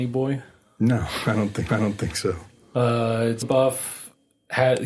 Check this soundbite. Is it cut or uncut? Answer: cut